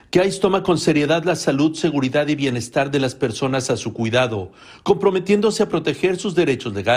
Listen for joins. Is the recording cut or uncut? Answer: uncut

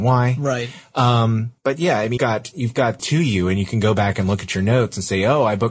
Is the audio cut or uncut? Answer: cut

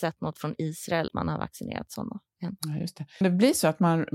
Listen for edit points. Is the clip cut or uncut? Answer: cut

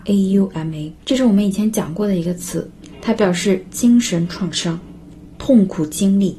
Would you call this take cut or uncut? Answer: cut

